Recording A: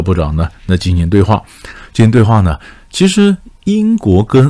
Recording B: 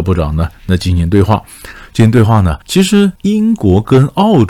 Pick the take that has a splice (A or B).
B